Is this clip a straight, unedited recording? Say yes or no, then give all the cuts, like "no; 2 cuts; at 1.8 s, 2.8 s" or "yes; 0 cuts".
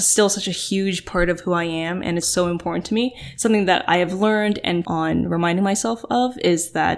no; 2 cuts; at 2.2 s, 4.8 s